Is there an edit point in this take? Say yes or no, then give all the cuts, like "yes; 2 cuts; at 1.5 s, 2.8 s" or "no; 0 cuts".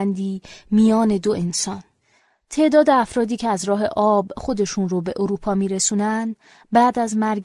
no; 0 cuts